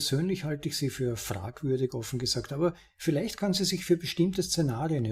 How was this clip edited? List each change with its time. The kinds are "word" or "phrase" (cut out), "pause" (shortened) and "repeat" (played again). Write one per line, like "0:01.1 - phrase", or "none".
none